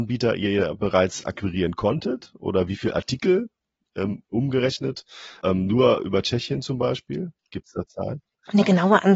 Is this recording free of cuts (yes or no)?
yes